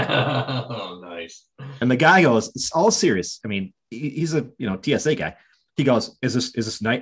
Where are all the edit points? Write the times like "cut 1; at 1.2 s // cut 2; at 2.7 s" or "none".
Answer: none